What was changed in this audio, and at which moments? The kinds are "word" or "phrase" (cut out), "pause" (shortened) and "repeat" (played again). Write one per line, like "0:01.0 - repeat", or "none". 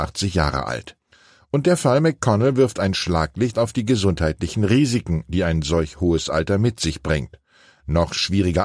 none